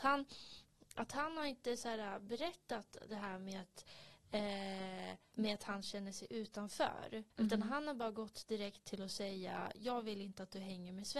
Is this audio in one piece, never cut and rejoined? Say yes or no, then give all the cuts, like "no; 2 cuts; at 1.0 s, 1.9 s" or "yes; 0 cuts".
no; 2 cuts; at 5.3 s, 7.3 s